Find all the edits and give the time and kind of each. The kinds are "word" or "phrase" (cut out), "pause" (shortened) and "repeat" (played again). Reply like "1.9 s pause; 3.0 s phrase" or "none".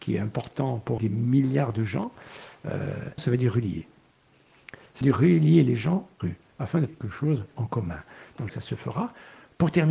1.0 s word; 3.2 s word; 5.0 s word; 6.2 s word; 6.9 s word; 8.5 s word